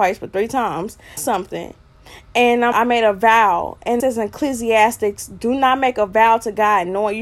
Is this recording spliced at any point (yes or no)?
yes